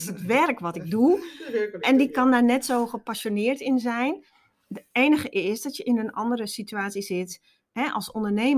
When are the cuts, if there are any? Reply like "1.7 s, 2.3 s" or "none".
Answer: none